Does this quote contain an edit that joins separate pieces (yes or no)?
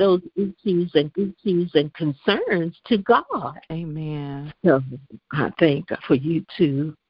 yes